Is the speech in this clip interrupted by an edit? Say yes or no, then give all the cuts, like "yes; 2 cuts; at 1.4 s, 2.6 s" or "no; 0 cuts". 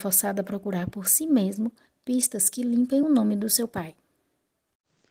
no; 0 cuts